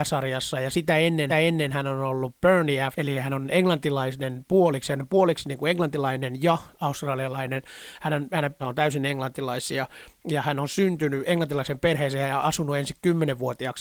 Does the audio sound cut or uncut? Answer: cut